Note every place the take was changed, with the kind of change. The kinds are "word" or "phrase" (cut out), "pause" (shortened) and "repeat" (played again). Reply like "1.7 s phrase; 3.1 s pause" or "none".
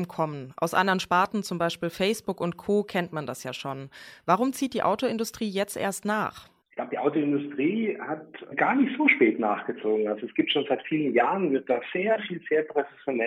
6.6 s pause; 8.5 s word